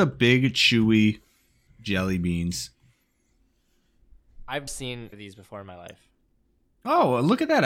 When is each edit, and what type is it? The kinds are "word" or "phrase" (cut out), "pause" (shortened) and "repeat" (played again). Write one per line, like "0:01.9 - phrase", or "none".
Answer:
0:01.7 - word
0:04.7 - word
0:05.1 - word